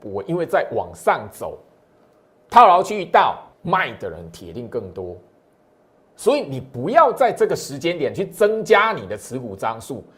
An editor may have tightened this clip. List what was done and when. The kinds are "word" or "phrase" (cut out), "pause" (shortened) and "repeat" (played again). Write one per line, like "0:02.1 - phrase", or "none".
0:03.5 - pause